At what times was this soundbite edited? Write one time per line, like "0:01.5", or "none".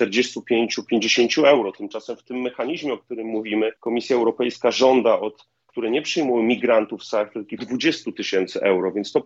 0:03.8
0:05.7
0:07.6